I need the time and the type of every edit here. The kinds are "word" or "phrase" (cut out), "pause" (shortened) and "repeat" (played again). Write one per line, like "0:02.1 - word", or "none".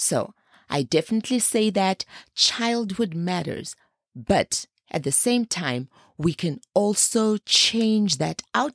none

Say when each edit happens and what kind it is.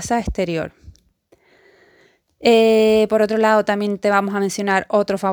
none

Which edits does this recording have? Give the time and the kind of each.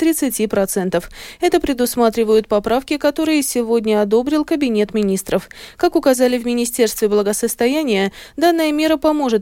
none

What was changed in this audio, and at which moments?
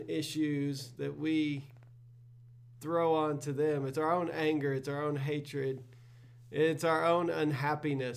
none

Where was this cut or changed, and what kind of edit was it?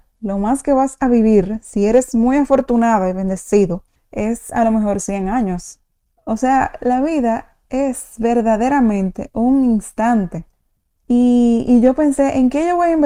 none

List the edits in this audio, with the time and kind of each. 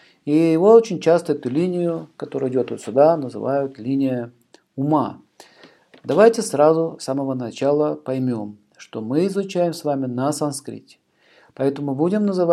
none

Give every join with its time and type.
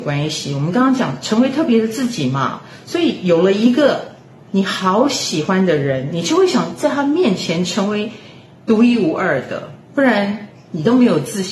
0:09.8 - pause

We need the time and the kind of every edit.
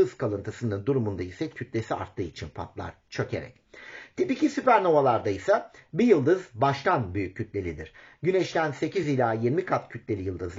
none

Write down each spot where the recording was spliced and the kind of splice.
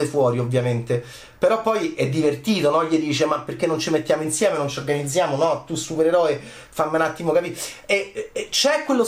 none

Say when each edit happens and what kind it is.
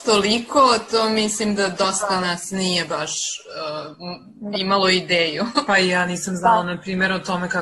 none

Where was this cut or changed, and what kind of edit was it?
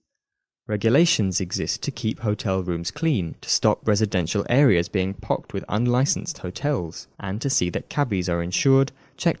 0:03.4 - pause
0:07.1 - pause

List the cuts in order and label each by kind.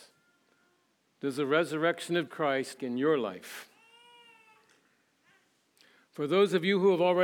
0:02.3 - word
0:02.8 - word

